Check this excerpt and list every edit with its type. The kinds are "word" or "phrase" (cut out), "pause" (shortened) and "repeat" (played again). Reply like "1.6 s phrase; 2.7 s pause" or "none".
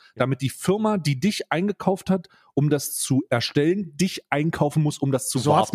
none